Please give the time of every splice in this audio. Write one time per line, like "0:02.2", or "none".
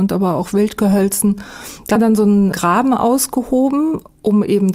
0:02.0